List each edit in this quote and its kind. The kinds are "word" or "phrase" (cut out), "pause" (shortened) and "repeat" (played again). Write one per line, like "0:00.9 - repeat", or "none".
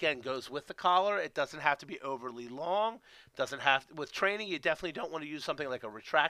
none